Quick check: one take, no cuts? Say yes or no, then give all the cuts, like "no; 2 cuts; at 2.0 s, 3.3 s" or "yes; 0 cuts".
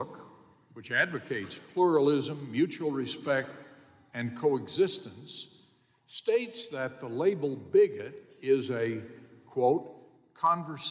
yes; 0 cuts